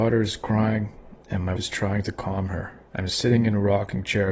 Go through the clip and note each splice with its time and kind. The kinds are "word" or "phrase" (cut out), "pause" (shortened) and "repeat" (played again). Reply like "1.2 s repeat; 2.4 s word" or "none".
1.2 s pause; 1.6 s word; 2.9 s pause